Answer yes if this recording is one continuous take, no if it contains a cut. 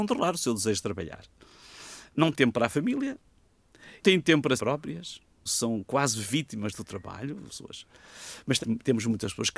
no